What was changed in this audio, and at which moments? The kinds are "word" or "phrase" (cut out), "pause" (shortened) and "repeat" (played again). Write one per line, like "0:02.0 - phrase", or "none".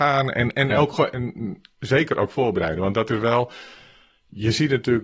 none